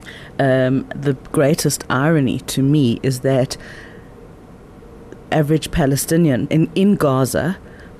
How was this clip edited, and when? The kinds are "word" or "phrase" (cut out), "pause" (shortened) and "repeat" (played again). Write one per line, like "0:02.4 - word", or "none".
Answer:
0:05.3 - word
0:06.5 - word